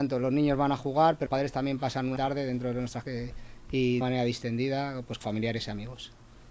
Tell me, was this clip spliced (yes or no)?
yes